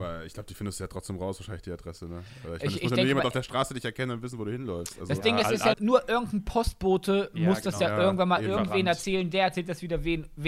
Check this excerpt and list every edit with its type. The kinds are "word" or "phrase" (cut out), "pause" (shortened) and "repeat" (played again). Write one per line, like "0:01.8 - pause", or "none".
0:05.7 - word